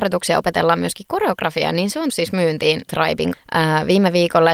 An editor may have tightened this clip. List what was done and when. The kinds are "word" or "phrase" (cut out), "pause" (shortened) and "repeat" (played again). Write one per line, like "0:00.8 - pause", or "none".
0:02.1 - word
0:02.9 - word
0:03.3 - word

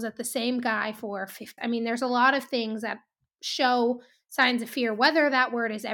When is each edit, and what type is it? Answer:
0:01.6 - word

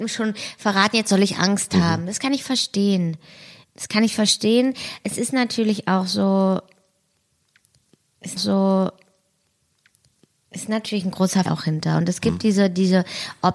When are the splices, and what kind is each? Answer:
0:08.4 - repeat
0:11.5 - word

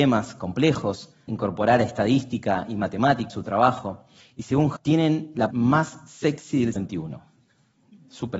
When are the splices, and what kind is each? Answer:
0:01.3 - word
0:03.3 - word
0:04.8 - word
0:05.5 - word
0:06.8 - word

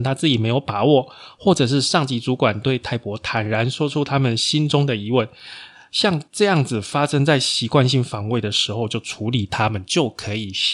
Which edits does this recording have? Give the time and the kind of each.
0:06.3 - pause

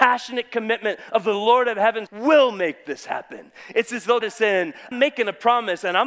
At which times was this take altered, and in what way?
0:02.1 - word
0:04.2 - word
0:04.9 - word

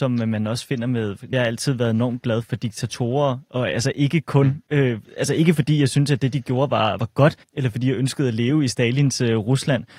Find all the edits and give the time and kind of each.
0:01.3 - word
0:02.4 - word
0:07.0 - word
0:07.4 - pause

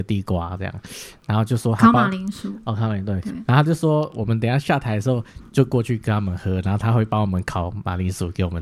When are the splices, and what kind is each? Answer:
0:05.5 - pause

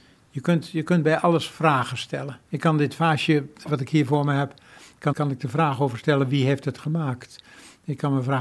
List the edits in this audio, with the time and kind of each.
0:02.5 - pause
0:05.1 - word

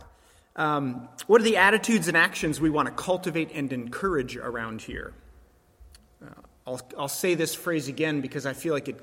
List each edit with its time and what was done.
none

